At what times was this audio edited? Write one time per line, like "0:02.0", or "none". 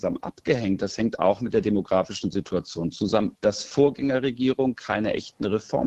0:03.4